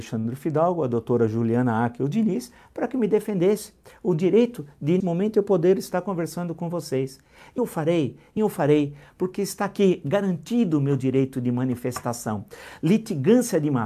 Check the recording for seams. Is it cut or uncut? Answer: cut